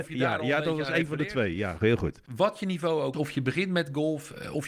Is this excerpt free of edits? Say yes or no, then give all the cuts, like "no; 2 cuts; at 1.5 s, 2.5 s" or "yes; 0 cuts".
no; 1 cut; at 3.1 s